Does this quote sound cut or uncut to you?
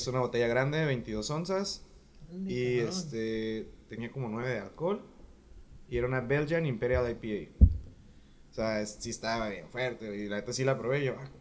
uncut